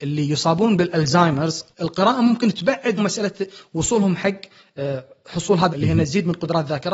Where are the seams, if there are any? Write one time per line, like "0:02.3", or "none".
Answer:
0:01.7
0:03.0
0:05.7

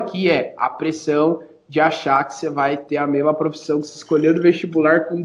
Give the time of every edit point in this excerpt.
none

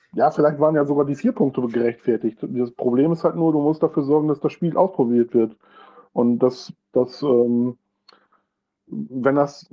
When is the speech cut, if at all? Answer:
none

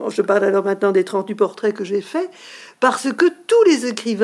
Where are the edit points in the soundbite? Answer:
none

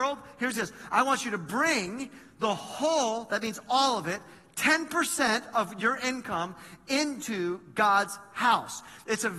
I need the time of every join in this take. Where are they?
none

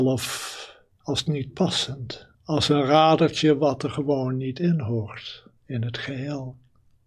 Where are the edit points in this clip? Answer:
0:02.3
0:05.6

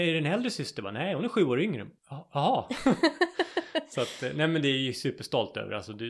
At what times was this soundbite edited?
0:02.0

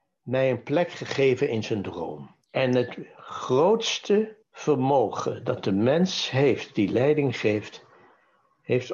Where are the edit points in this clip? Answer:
0:02.4
0:04.4

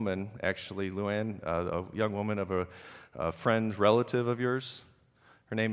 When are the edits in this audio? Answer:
none

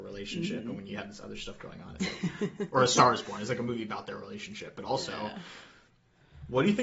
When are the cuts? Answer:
none

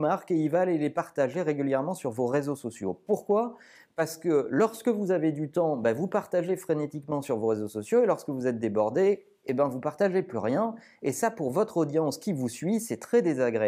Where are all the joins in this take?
none

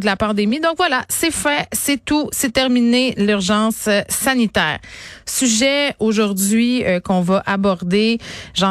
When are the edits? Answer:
none

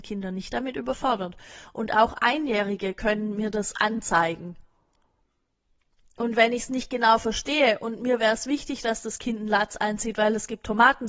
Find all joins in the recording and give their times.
none

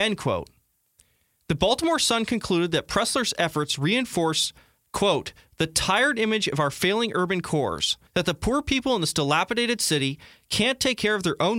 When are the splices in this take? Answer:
0:08.1

